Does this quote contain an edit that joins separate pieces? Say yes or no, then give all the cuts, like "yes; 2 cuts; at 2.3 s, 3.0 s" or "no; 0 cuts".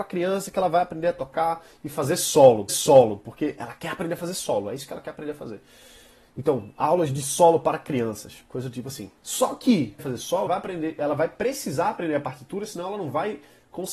yes; 4 cuts; at 2.7 s, 9.2 s, 10.0 s, 10.5 s